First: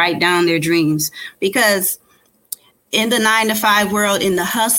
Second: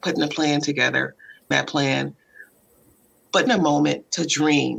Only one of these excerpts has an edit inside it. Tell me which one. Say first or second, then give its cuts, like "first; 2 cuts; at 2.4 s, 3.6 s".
second; 2 cuts; at 1.5 s, 3.5 s